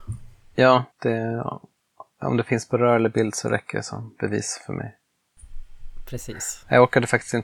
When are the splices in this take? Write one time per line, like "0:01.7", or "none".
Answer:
0:00.9